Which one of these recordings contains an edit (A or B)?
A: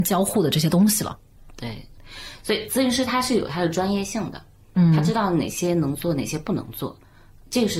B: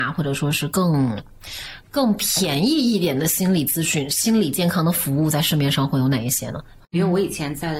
B